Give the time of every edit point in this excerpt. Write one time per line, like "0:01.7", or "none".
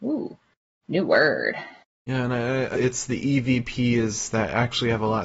0:01.8
0:02.7